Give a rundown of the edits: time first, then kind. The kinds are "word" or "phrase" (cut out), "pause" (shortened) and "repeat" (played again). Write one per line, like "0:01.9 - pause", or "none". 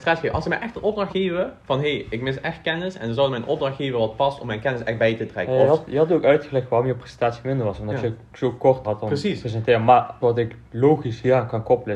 0:01.1 - word
0:01.6 - pause
0:08.8 - word
0:10.2 - phrase
0:10.7 - pause